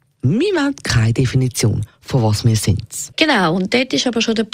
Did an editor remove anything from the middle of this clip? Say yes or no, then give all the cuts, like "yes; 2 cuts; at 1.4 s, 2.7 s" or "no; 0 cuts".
yes; 1 cut; at 3.1 s